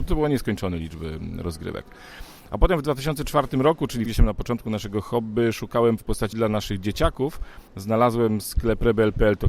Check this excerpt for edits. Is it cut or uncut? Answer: cut